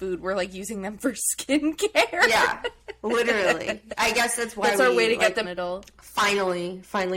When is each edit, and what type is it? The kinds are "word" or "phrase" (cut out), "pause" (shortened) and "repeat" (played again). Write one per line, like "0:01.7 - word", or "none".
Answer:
0:05.4 - phrase

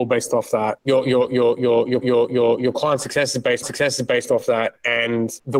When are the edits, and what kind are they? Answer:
0:02.0 - repeat
0:03.6 - repeat

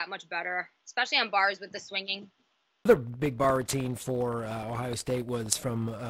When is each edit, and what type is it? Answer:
none

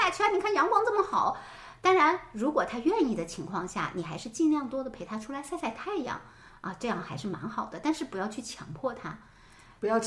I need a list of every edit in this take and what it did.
none

